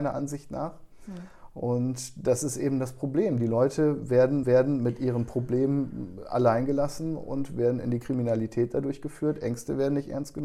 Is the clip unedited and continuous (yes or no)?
no